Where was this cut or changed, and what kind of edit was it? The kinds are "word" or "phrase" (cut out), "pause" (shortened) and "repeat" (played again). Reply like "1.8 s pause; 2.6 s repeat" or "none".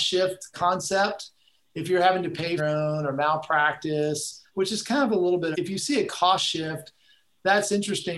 2.6 s phrase; 4.5 s pause; 5.5 s phrase